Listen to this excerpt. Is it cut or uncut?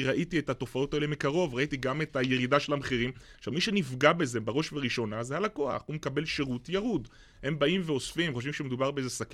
uncut